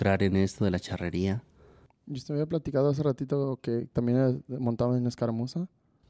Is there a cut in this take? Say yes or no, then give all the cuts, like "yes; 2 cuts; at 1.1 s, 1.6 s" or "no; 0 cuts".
no; 0 cuts